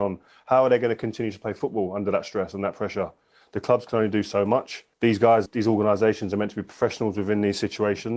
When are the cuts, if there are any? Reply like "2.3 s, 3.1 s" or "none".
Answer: 4.9 s, 5.5 s